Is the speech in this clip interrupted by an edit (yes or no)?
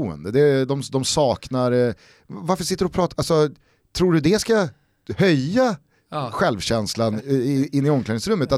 no